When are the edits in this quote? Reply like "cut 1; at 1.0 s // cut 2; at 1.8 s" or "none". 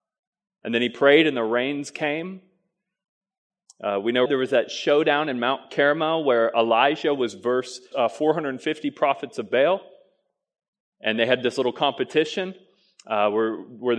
cut 1; at 4.3 s // cut 2; at 7.9 s